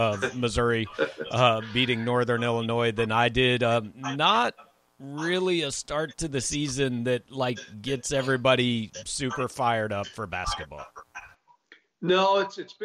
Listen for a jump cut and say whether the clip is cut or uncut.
uncut